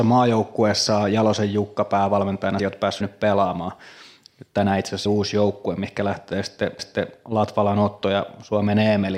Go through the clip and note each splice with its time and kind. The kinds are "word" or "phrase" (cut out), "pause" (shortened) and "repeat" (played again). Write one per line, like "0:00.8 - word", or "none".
0:02.6 - word
0:03.0 - word
0:05.1 - word
0:06.8 - repeat